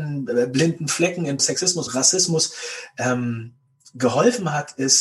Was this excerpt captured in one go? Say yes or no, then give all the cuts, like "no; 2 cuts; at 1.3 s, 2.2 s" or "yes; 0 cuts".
no; 2 cuts; at 1.4 s, 1.9 s